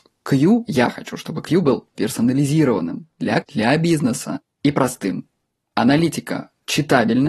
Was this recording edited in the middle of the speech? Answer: yes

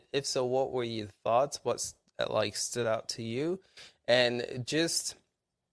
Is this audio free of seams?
yes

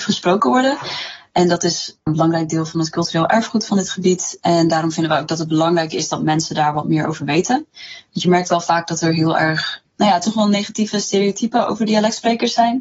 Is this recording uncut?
yes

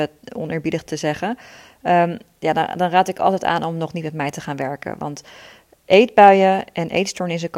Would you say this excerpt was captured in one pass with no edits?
yes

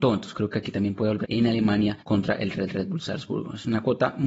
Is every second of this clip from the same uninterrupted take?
no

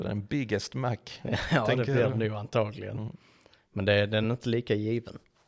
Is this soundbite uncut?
yes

